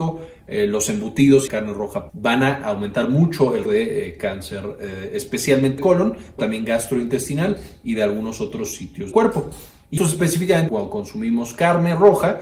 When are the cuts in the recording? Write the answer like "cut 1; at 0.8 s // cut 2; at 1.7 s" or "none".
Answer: cut 1; at 1.5 s // cut 2; at 2.1 s // cut 3; at 3.7 s // cut 4; at 5.8 s // cut 5; at 6.4 s // cut 6; at 9.1 s // cut 7; at 10.0 s // cut 8; at 10.7 s